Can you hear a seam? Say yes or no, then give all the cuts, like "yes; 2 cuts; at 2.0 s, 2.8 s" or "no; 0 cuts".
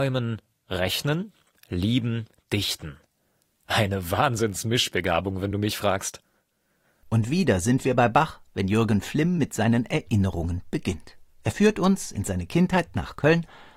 no; 0 cuts